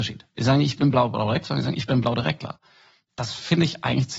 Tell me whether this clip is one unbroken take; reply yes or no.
yes